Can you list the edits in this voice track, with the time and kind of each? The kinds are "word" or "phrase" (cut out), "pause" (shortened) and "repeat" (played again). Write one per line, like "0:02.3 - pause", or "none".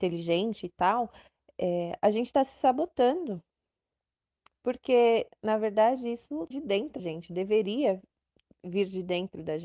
0:06.5 - word
0:07.0 - word

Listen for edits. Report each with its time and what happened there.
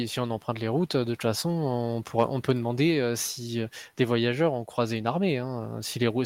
none

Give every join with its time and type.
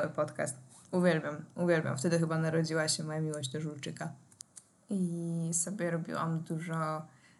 0:04.7 - pause

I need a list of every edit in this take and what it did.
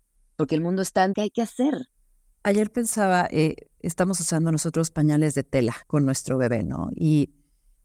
0:01.1 - word
0:03.7 - pause
0:05.8 - pause

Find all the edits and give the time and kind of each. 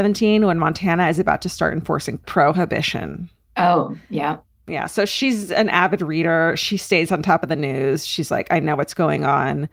none

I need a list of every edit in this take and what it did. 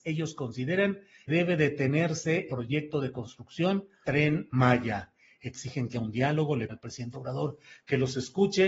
0:01.3 - word
0:02.5 - word
0:04.0 - word
0:05.9 - word
0:06.7 - word
0:07.1 - word

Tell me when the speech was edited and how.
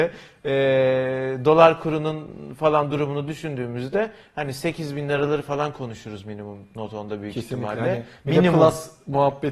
none

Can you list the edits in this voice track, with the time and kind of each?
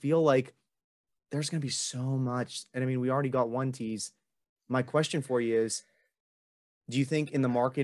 none

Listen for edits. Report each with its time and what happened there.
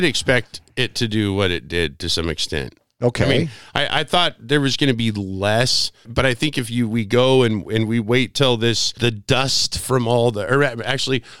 none

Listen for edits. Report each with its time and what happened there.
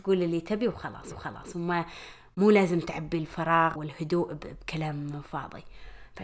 0:01.1 - repeat
0:03.8 - word

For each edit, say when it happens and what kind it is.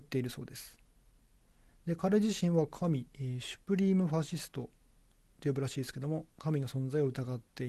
0:05.3 - word

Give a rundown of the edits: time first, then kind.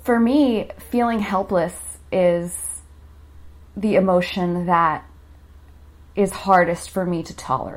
none

